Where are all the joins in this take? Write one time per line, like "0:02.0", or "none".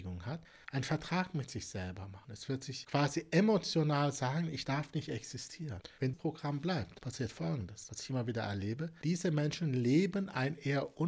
0:06.1